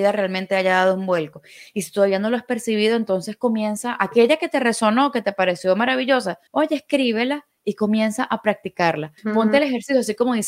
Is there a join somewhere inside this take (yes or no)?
yes